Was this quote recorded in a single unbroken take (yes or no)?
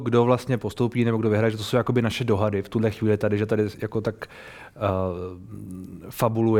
yes